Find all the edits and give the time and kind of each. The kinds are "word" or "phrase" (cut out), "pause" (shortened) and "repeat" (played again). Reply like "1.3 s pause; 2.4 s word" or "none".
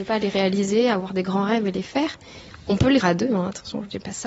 3.0 s word